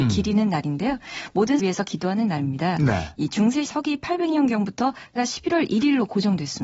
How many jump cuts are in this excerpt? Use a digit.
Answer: 3